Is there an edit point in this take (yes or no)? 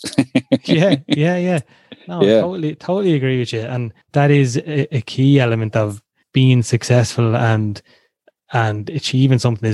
yes